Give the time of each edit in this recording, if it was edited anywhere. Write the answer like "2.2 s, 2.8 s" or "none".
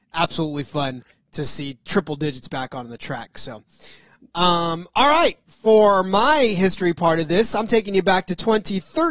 none

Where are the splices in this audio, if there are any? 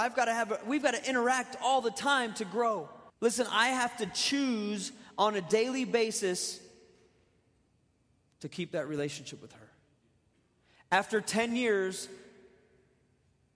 3.1 s

